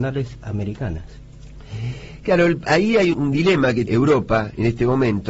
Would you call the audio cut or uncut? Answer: cut